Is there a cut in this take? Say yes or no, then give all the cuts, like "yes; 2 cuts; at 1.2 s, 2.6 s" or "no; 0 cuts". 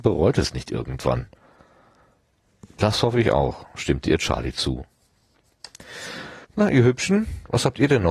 yes; 1 cut; at 6.4 s